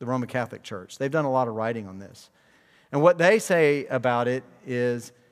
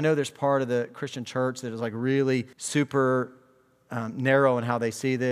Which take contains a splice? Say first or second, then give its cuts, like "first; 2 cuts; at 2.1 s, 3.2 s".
second; 1 cut; at 2.5 s